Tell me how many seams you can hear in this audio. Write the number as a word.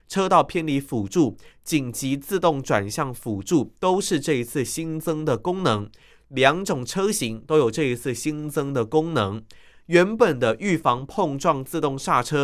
zero